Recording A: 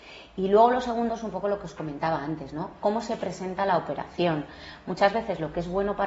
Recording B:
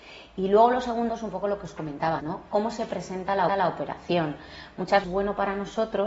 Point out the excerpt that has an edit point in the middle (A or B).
B